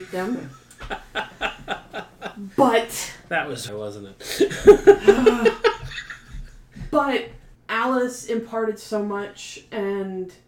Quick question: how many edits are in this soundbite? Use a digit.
2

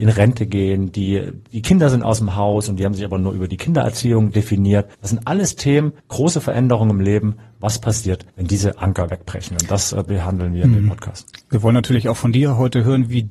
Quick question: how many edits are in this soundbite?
3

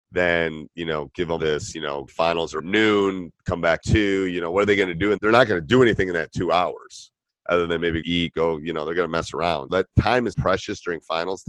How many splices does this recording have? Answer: 9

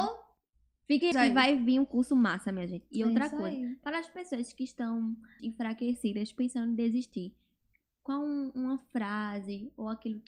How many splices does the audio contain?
2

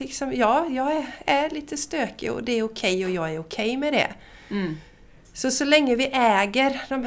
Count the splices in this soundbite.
0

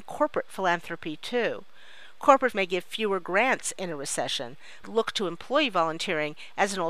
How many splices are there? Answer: 2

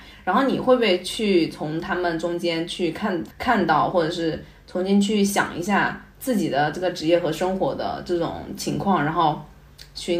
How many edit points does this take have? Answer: 1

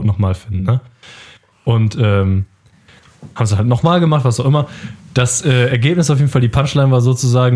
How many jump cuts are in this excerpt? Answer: 0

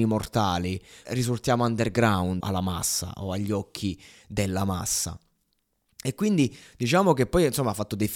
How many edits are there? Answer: 2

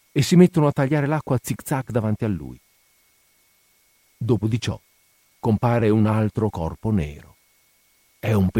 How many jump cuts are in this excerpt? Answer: 0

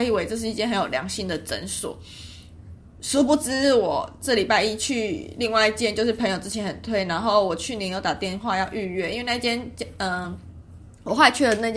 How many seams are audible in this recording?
0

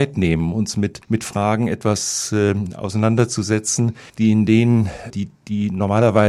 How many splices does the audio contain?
3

